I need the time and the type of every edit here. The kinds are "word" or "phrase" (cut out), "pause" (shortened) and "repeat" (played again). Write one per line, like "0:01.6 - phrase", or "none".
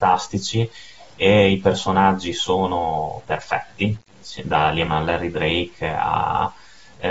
0:04.9 - word